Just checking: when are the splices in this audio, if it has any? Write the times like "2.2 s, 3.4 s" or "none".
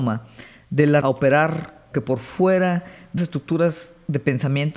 1.0 s, 1.9 s, 3.2 s